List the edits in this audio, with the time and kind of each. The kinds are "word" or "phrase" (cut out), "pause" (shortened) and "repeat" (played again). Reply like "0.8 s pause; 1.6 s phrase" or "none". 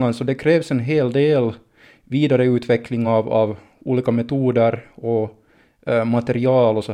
none